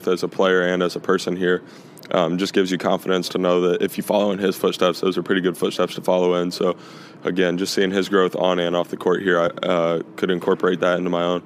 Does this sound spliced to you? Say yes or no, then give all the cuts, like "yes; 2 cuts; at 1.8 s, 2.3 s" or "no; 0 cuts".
no; 0 cuts